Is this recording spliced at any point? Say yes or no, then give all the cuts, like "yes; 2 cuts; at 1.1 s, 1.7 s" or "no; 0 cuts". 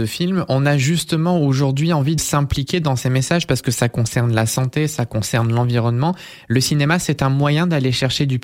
yes; 1 cut; at 2.2 s